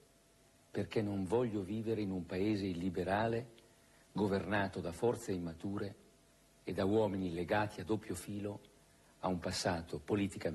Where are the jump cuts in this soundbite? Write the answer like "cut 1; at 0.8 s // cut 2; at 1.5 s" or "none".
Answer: none